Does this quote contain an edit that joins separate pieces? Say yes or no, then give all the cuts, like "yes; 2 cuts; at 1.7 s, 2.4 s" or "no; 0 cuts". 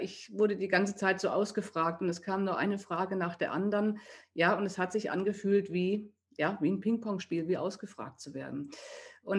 no; 0 cuts